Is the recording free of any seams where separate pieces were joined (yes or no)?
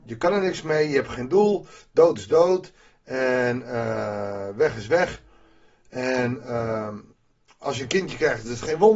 yes